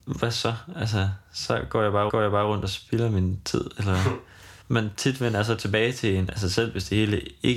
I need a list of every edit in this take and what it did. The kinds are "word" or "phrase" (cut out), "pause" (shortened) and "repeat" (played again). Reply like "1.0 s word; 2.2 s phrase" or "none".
2.1 s repeat; 4.6 s pause

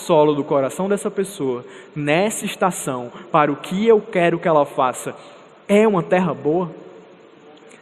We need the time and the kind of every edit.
none

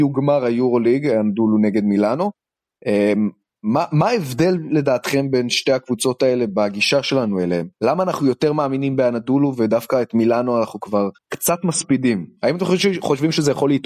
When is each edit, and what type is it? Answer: 7.7 s pause; 11.2 s pause

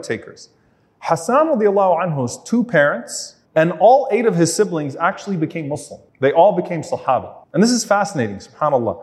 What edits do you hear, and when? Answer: 3.5 s pause; 6.1 s pause; 7.4 s pause

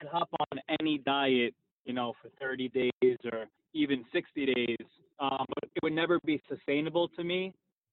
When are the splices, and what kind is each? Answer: none

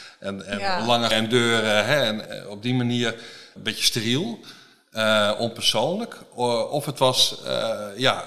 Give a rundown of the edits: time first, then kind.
1.1 s word; 2.3 s word; 3.6 s word

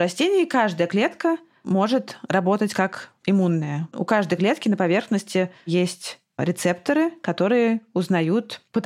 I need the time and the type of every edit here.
none

